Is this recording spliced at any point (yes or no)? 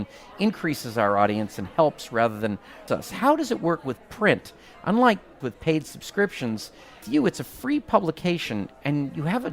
yes